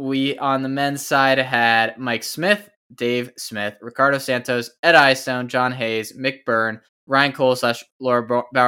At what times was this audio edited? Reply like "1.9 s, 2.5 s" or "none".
6.9 s